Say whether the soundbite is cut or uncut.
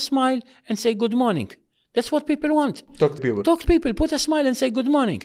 cut